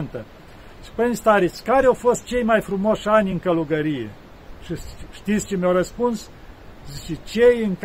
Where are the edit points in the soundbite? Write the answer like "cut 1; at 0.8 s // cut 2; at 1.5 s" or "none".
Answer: none